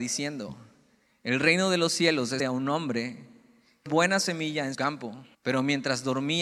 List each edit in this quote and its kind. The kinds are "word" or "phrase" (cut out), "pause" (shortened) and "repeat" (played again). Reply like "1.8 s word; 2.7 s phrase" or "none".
2.4 s word; 3.9 s word; 4.7 s word; 5.3 s pause